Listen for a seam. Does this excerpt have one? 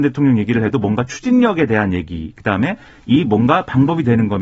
no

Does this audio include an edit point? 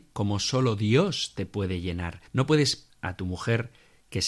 yes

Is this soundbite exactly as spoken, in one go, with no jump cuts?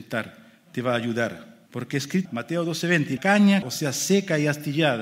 no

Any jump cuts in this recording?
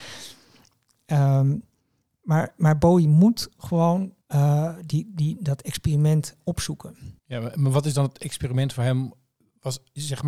yes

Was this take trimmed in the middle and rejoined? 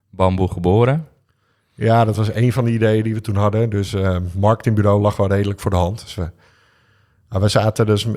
no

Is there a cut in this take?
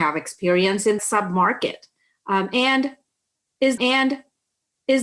yes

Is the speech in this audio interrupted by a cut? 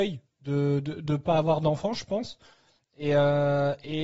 no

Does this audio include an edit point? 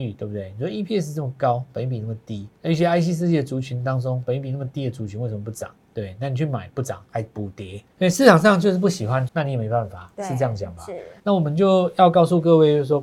yes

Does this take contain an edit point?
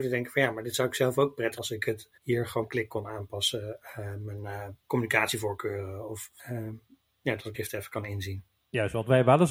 yes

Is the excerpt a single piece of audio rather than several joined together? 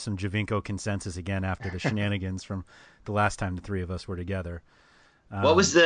yes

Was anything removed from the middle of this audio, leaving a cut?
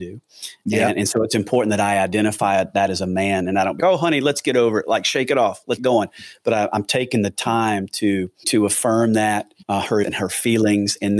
yes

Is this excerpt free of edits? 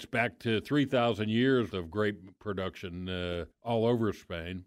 no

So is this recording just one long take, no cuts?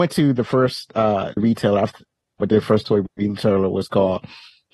no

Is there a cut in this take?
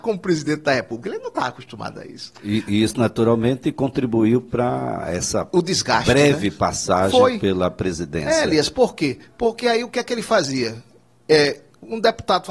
no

